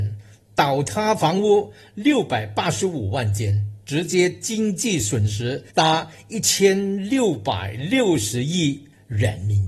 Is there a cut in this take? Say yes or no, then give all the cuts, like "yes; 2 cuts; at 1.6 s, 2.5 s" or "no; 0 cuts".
yes; 1 cut; at 5.7 s